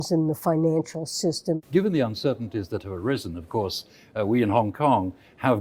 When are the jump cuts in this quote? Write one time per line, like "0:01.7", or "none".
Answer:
none